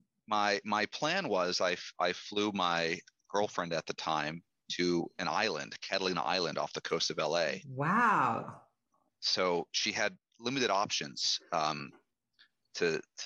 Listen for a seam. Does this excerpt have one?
no; 0 cuts

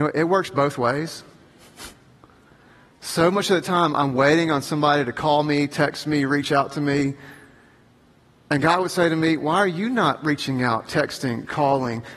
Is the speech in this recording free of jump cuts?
yes; 0 cuts

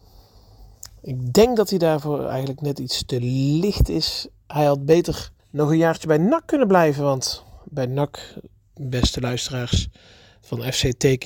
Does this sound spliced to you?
yes; 1 cut; at 5.4 s

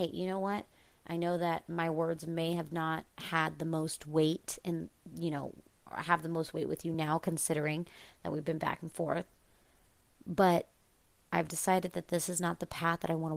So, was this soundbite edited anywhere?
no; 0 cuts

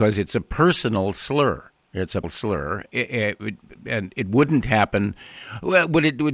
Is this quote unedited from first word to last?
no; 2 cuts; at 2.2 s, 2.9 s

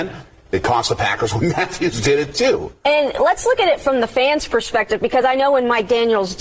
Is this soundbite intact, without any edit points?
yes; 0 cuts

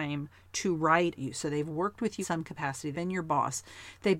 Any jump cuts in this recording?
yes; 3 cuts; at 1.2 s, 2.2 s, 2.9 s

